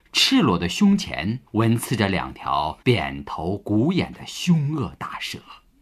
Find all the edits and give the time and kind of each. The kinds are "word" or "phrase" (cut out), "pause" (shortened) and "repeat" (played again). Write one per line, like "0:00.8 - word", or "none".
0:01.5 - pause
0:02.8 - pause